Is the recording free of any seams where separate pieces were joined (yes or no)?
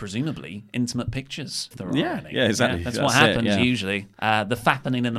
no